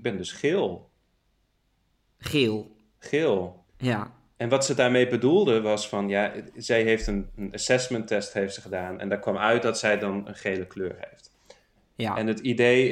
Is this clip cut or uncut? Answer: cut